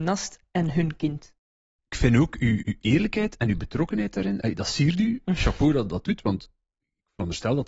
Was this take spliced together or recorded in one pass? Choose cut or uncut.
cut